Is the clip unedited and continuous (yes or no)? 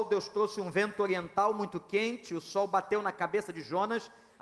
yes